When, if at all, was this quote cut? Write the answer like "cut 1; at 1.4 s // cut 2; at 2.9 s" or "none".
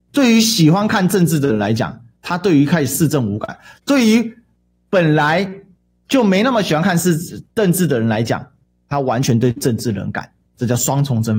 none